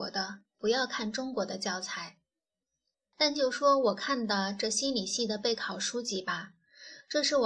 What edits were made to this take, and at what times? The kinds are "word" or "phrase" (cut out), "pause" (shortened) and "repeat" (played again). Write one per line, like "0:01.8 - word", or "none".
0:02.6 - pause